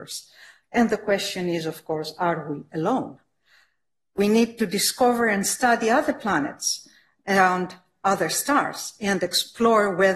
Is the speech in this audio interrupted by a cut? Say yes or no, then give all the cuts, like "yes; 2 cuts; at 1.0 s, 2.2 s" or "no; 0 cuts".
no; 0 cuts